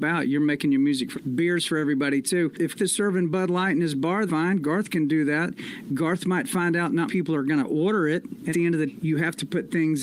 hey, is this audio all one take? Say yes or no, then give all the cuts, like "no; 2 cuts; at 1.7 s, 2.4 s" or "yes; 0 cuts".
no; 6 cuts; at 1.1 s, 2.8 s, 4.3 s, 7.1 s, 8.5 s, 8.9 s